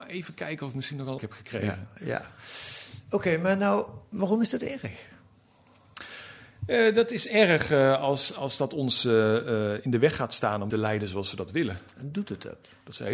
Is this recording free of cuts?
no; 2 cuts; at 1.2 s, 10.7 s

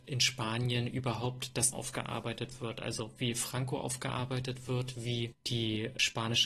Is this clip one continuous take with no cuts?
no; 1 cut; at 1.7 s

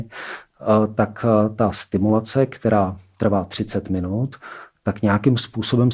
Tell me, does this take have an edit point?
no; 0 cuts

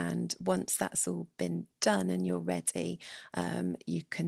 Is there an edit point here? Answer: no; 0 cuts

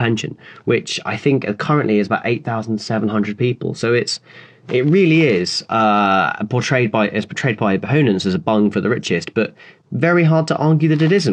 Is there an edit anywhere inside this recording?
no; 0 cuts

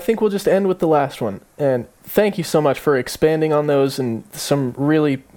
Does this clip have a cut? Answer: no; 0 cuts

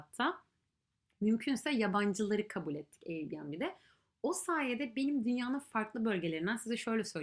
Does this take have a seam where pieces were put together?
no; 0 cuts

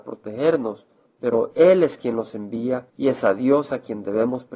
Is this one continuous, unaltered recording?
no; 2 cuts; at 1.1 s, 2.9 s

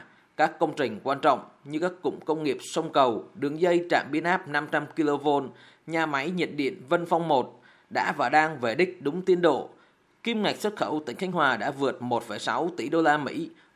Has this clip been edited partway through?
no; 0 cuts

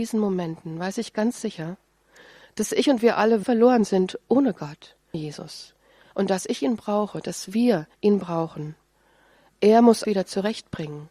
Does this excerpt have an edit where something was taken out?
yes; 4 cuts; at 3.4 s, 5.1 s, 7.9 s, 10.0 s

